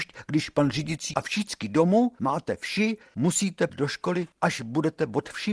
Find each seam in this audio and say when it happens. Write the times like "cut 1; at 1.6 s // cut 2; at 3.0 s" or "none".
cut 1; at 1.1 s // cut 2; at 3.7 s

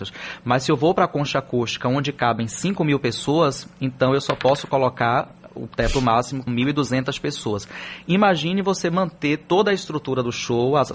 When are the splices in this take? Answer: cut 1; at 6.5 s

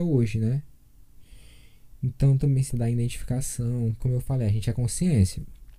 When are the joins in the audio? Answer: cut 1; at 2.4 s // cut 2; at 2.7 s // cut 3; at 4.0 s

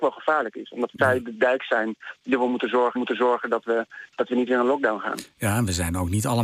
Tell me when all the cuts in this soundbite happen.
cut 1; at 3.0 s

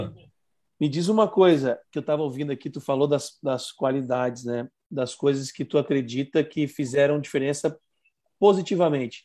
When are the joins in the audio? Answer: none

